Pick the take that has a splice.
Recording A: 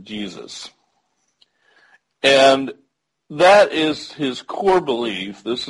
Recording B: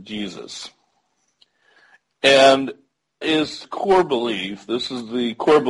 B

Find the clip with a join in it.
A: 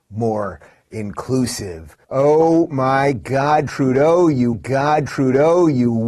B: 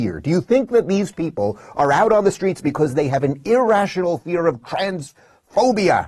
A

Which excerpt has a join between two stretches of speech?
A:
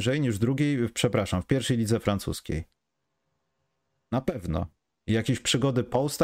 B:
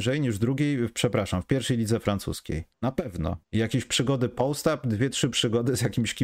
B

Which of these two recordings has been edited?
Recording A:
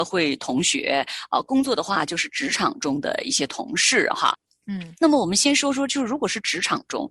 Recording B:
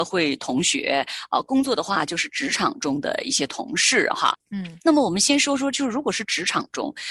B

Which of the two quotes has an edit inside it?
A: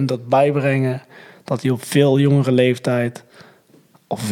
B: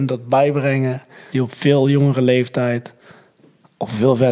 B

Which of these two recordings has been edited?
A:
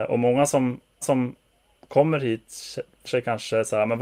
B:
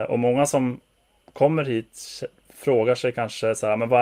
A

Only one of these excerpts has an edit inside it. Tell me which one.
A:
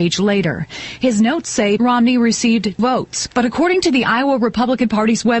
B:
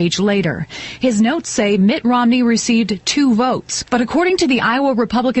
A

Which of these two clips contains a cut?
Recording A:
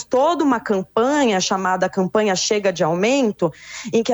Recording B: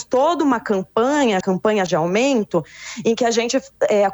B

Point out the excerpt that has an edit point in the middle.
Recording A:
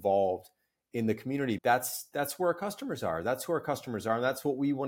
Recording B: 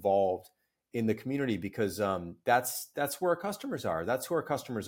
A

